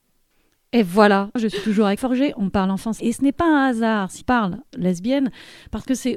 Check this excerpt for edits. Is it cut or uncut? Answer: cut